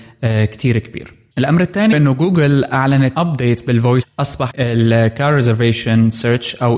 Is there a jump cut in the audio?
yes; 5 cuts; at 1.3 s, 1.9 s, 3.1 s, 4.0 s, 4.5 s

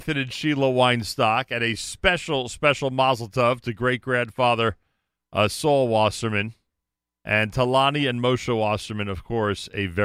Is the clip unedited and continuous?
yes; 0 cuts

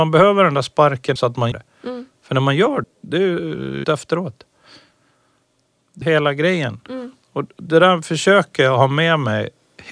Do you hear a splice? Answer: yes; 6 cuts; at 1.2 s, 1.5 s, 2.8 s, 3.8 s, 6.0 s, 7.2 s

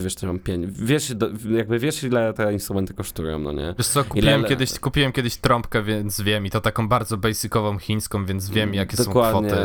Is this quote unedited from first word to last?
yes; 0 cuts

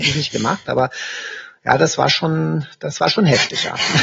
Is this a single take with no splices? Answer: yes; 0 cuts

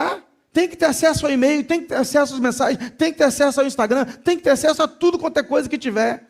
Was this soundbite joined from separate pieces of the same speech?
no; 0 cuts

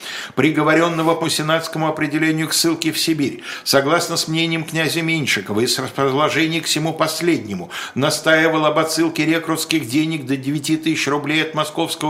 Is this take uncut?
no; 1 cut; at 1.2 s

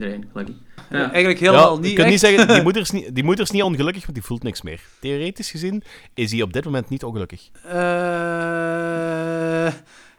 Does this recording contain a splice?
no; 0 cuts

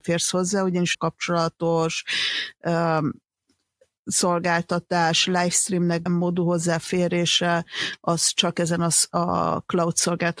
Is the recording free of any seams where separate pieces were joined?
no; 2 cuts; at 0.9 s, 6.1 s

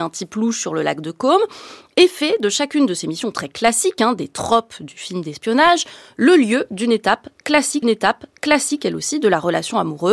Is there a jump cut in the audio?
yes; 1 cut; at 7.8 s

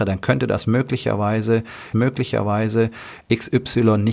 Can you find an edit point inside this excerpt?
yes; 1 cut; at 1.9 s

